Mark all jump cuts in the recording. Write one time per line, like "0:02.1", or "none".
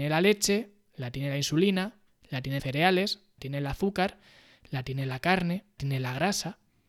0:02.6
0:03.4
0:05.8